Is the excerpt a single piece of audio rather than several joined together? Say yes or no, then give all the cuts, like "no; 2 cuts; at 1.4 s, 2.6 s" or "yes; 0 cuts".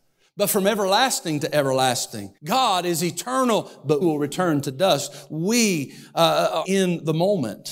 no; 3 cuts; at 2.4 s, 4.0 s, 6.6 s